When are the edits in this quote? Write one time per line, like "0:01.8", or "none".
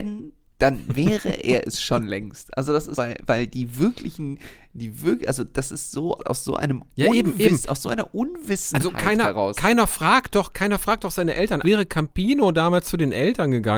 0:02.9
0:06.2
0:11.6